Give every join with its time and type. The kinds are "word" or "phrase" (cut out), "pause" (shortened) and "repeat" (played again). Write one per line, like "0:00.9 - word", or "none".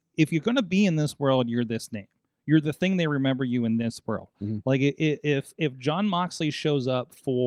0:05.0 - word